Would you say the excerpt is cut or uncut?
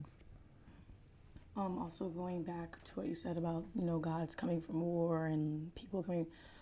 uncut